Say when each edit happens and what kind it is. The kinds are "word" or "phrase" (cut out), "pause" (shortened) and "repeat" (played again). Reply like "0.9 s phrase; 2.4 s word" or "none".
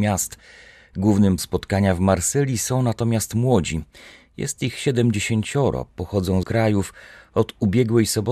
1.4 s word; 6.4 s phrase